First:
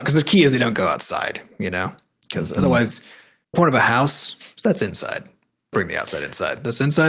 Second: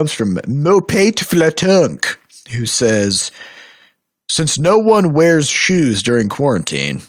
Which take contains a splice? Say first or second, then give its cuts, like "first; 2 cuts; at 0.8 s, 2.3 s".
first; 2 cuts; at 3.5 s, 5.7 s